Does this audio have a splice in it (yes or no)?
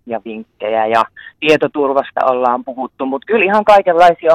no